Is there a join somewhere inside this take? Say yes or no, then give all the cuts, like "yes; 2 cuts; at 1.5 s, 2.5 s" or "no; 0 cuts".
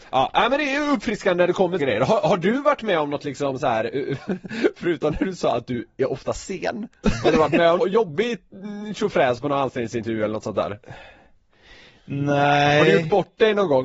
yes; 2 cuts; at 1.8 s, 7.8 s